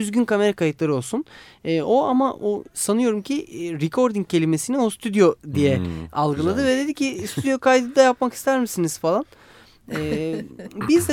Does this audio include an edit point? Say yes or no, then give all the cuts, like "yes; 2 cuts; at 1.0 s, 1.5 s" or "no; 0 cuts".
no; 0 cuts